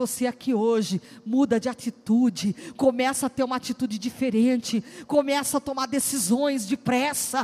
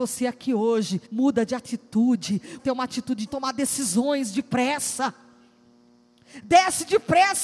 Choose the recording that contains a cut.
second; 3 cuts; at 1.1 s, 2.6 s, 3.3 s

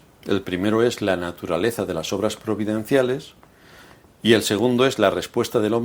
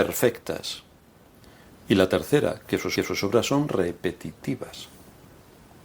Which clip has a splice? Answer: second; 1 cut; at 3.0 s

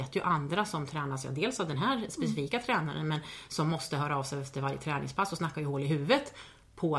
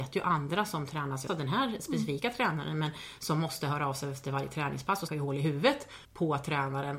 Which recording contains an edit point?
second; 3 cuts; at 1.3 s, 5.1 s, 6.0 s

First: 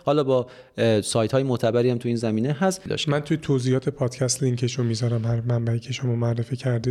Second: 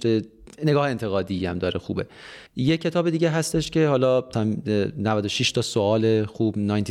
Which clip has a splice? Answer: second; 1 cut; at 2.5 s

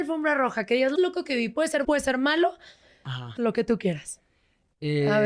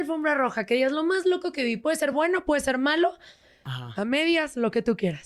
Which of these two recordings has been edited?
first; 3 cuts; at 1.0 s, 1.8 s, 3.4 s

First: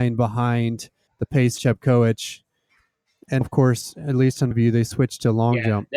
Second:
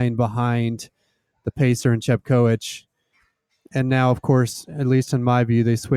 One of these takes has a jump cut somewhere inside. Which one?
first; 4 cuts; at 1.1 s, 1.6 s, 3.4 s, 4.5 s

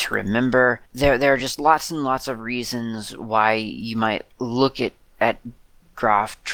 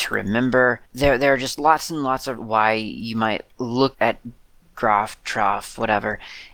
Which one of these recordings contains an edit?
second; 2 cuts; at 2.4 s, 3.9 s

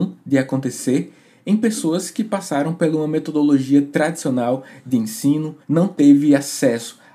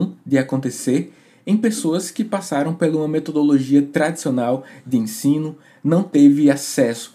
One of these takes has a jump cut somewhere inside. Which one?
first; 1 cut; at 5.6 s

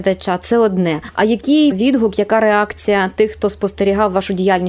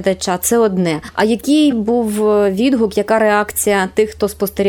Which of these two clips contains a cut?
first; 1 cut; at 1.7 s

